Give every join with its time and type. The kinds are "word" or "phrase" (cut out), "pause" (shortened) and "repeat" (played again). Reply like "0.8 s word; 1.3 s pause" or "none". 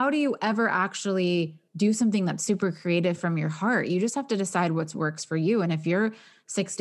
1.7 s pause